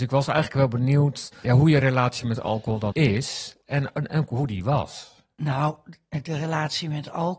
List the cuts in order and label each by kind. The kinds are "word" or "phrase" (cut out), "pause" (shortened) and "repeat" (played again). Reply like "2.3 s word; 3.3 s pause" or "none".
1.4 s word; 2.9 s word